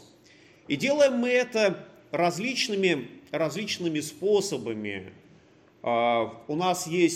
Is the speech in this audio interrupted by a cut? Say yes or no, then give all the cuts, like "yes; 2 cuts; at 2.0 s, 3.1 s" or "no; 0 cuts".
no; 0 cuts